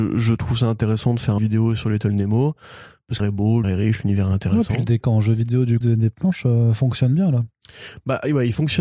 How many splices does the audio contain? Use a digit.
5